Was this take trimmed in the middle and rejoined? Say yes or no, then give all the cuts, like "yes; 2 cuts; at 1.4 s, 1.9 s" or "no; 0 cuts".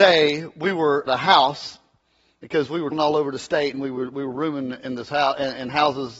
yes; 2 cuts; at 1.1 s, 2.9 s